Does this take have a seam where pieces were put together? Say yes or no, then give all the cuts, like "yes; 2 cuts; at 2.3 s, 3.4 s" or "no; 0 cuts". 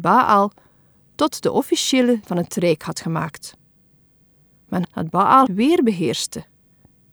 yes; 3 cuts; at 2.2 s, 4.8 s, 5.5 s